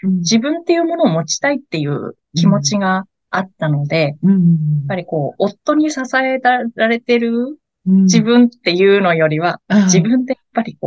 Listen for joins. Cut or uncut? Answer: uncut